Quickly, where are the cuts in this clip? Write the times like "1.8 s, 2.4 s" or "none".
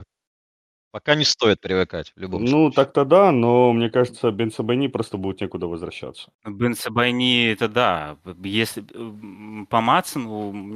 6.3 s

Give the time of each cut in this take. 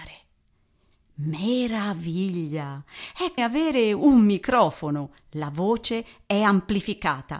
3.4 s

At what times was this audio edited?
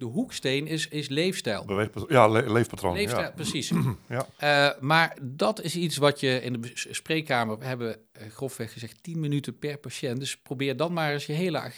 4.3 s

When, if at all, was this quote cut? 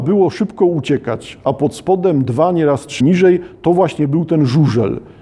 3.0 s

